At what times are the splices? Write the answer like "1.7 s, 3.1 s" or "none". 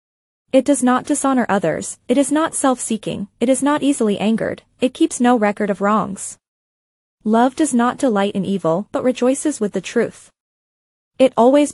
none